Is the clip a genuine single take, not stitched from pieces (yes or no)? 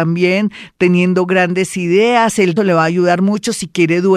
no